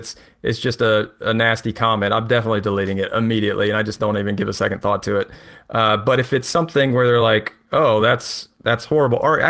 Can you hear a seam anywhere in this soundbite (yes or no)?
no